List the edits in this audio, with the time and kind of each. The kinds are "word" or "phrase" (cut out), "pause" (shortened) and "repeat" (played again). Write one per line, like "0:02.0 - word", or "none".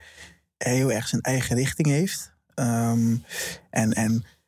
none